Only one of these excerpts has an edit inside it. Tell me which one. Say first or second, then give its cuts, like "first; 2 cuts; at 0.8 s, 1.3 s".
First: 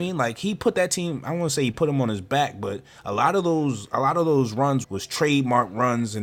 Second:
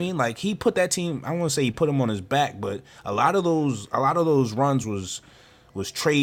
first; 1 cut; at 4.8 s